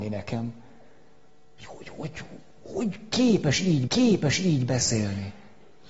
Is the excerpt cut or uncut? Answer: cut